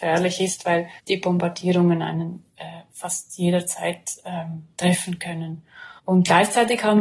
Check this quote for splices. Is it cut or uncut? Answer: cut